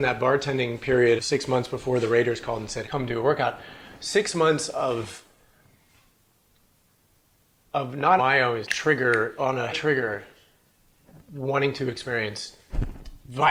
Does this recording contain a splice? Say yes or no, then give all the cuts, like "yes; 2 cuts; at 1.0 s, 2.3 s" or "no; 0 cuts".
yes; 6 cuts; at 1.2 s, 2.8 s, 8.2 s, 8.6 s, 9.4 s, 9.7 s